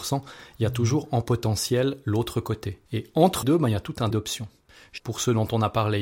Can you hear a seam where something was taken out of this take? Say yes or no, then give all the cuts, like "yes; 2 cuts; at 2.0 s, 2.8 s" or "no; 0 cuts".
yes; 4 cuts; at 2.9 s, 3.4 s, 4.1 s, 5.0 s